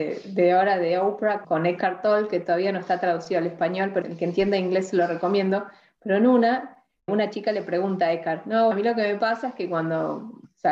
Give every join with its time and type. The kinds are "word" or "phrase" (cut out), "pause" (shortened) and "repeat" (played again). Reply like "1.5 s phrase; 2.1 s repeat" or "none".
1.4 s word; 4.0 s word; 7.1 s word; 8.7 s word